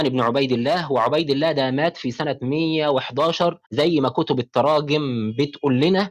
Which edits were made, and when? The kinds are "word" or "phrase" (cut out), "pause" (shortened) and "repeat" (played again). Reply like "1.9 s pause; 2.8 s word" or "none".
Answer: 3.6 s pause